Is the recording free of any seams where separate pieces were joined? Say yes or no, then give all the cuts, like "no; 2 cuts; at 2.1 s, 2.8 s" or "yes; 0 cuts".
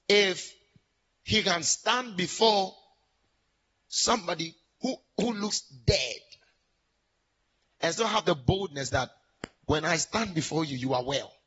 yes; 0 cuts